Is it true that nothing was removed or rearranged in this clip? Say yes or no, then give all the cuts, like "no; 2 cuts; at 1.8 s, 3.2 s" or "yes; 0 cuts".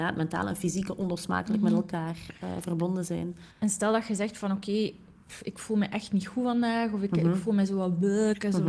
no; 1 cut; at 3.5 s